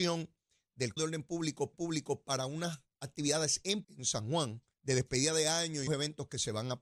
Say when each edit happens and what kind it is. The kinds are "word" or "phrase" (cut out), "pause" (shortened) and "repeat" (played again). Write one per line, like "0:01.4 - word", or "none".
0:01.0 - word
0:01.7 - repeat
0:03.8 - word
0:04.7 - pause
0:05.9 - word

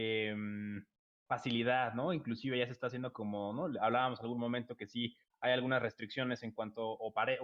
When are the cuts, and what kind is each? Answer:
none

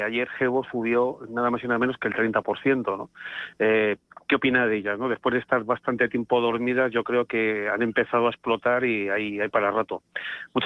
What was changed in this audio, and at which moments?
none

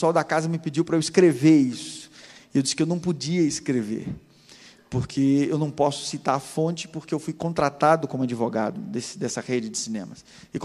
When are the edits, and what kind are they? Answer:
none

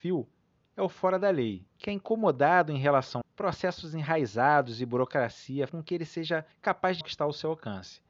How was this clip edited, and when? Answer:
0:01.7 - pause
0:03.2 - phrase
0:05.7 - word
0:06.5 - pause
0:07.0 - word

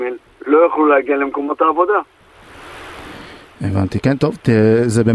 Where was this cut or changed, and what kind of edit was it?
none

